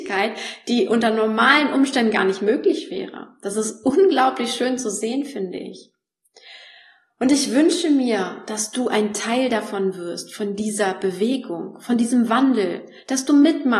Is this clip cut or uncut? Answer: uncut